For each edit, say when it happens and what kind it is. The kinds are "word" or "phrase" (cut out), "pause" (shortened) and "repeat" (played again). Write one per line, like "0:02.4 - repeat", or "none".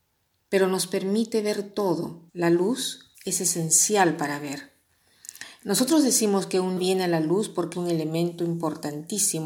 0:02.3 - pause
0:03.1 - pause
0:06.8 - word
0:07.7 - phrase